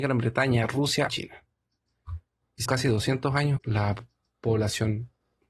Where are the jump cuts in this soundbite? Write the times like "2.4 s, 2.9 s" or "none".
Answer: 1.1 s, 2.7 s, 3.6 s